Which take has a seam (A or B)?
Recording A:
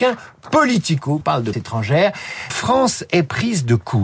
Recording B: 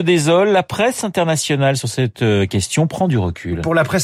A